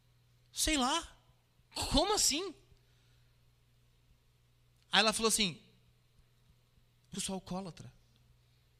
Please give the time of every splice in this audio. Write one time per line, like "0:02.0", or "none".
0:07.1

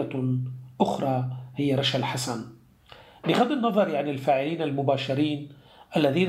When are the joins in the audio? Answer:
none

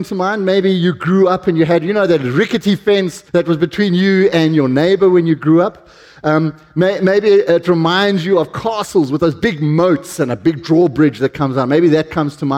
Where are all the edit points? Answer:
0:03.3

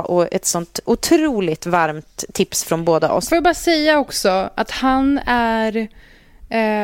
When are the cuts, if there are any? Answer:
none

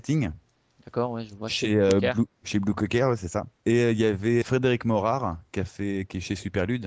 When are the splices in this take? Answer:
0:04.4

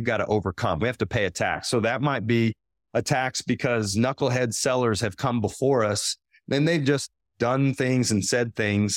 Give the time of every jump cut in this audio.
none

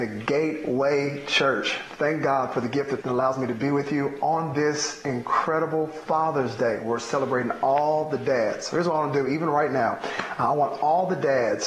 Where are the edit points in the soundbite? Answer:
0:03.0

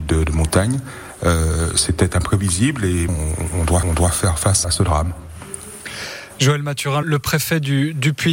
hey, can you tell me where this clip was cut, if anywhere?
0:01.7
0:03.1
0:03.8
0:04.6
0:07.0

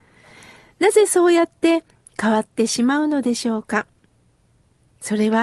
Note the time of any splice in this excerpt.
none

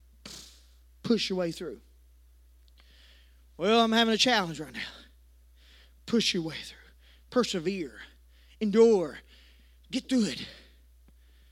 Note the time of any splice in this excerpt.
none

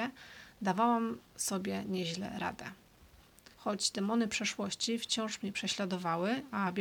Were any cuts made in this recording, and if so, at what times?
0:03.5

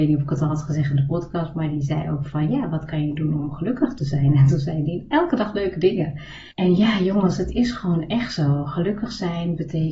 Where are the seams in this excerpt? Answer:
0:06.5

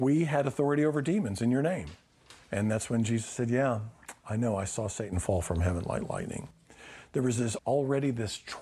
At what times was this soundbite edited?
0:02.4

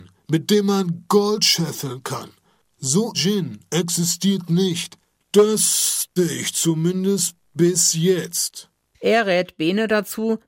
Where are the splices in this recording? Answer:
0:03.1
0:06.2

